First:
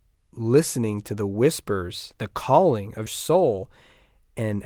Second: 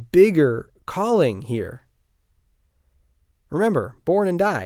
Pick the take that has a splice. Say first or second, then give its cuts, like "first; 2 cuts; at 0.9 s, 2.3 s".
first; 1 cut; at 3.1 s